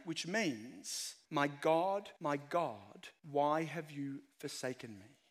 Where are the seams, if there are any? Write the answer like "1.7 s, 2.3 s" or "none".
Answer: 1.3 s, 2.2 s, 3.2 s